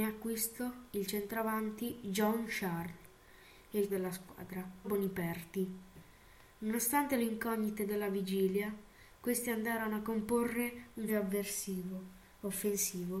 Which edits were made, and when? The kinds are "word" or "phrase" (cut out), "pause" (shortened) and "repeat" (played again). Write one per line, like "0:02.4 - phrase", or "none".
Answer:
0:03.9 - word
0:04.8 - phrase
0:11.1 - word